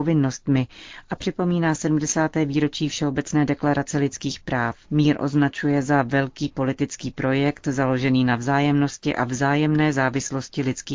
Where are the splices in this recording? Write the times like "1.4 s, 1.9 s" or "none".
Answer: 4.8 s